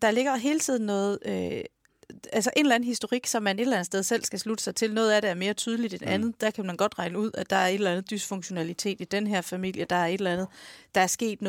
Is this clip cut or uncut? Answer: uncut